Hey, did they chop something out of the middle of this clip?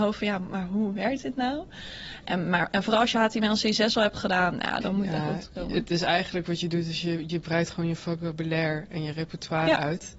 yes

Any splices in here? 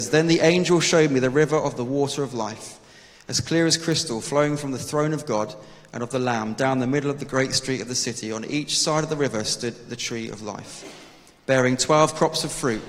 no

